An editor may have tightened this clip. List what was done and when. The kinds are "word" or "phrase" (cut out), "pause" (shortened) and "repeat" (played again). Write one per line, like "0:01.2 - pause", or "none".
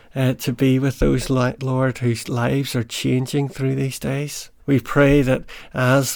0:01.6 - word
0:04.6 - pause